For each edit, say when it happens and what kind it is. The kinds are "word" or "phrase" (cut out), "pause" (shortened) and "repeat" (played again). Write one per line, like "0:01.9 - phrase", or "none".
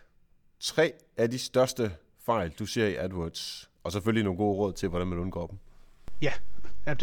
none